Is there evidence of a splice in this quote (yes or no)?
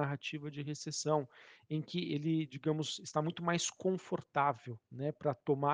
no